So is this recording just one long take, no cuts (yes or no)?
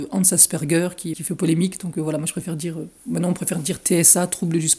no